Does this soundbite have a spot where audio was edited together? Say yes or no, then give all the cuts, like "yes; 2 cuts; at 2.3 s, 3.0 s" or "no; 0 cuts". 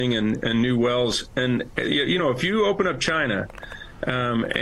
no; 0 cuts